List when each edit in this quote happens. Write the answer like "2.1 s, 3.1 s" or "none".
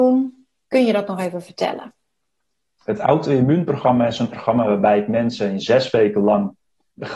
4.3 s